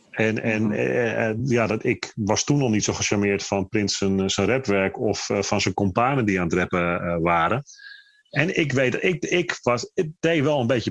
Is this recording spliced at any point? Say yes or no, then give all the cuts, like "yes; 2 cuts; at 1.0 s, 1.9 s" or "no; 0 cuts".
no; 0 cuts